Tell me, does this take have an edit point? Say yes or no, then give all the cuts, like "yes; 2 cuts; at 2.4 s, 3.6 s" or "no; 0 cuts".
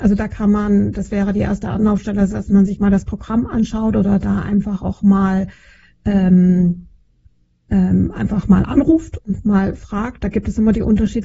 no; 0 cuts